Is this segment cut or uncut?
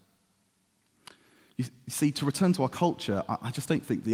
uncut